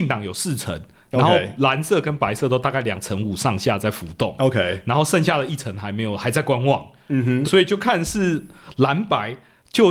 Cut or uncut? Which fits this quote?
cut